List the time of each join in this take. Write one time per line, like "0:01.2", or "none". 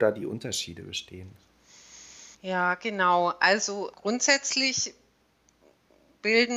0:02.3
0:03.9